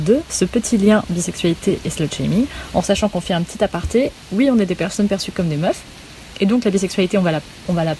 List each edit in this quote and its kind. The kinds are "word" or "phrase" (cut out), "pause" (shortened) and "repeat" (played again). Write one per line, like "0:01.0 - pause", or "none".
0:01.1 - word